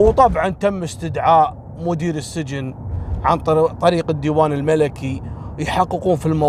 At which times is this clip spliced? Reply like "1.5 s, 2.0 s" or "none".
none